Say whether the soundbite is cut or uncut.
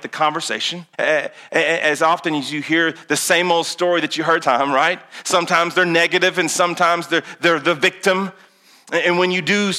cut